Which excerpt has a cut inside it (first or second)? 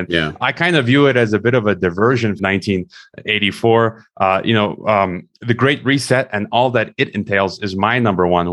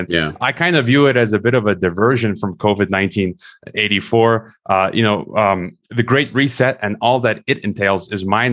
first